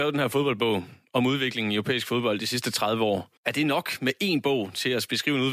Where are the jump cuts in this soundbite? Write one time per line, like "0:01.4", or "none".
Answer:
0:03.4